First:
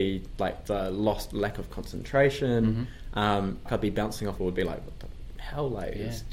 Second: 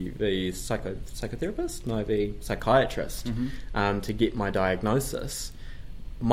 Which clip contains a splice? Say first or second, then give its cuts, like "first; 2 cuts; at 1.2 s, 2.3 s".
first; 2 cuts; at 3.7 s, 4.4 s